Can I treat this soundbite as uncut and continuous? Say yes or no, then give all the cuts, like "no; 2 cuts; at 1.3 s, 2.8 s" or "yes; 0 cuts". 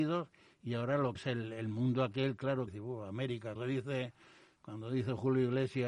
no; 3 cuts; at 1.2 s, 2.7 s, 3.6 s